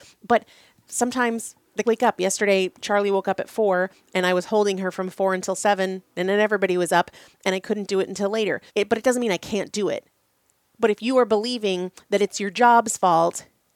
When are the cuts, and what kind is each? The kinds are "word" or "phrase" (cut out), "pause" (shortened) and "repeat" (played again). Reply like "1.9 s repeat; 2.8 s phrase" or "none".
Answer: 1.8 s word; 8.7 s pause; 10.2 s pause